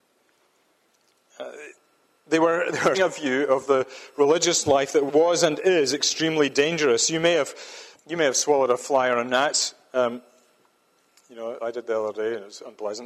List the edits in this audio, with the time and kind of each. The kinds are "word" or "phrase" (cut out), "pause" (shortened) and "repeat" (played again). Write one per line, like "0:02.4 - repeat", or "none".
0:02.9 - word
0:05.1 - word
0:07.9 - word